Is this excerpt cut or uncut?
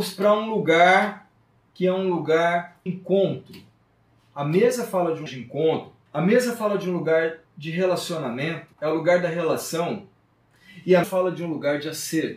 cut